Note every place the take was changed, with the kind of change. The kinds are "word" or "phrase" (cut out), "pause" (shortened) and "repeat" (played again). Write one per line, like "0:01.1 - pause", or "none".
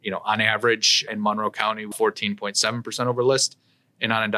0:01.1 - word
0:01.9 - word